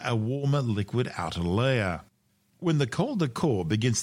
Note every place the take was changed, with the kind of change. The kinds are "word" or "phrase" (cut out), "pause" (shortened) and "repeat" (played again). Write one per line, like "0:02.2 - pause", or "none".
none